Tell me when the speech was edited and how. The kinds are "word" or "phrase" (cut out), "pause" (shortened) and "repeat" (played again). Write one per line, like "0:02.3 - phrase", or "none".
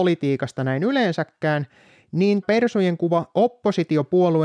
0:02.4 - word